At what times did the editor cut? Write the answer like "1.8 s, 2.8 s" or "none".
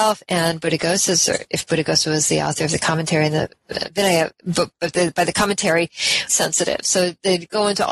6.3 s